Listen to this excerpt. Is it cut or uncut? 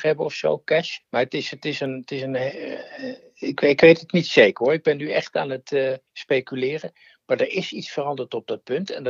cut